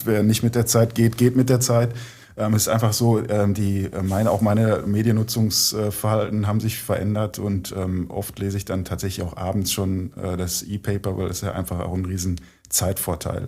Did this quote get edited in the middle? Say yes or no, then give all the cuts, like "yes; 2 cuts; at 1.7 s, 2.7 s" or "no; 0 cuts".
no; 0 cuts